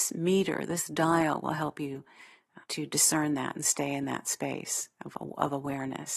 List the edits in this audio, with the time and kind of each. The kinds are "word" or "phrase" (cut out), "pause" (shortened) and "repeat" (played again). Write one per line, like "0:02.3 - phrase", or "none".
0:02.6 - pause